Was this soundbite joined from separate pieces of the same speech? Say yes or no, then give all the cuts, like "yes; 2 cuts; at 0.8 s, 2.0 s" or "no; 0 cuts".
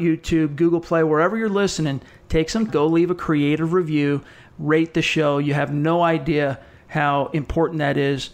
yes; 1 cut; at 2.7 s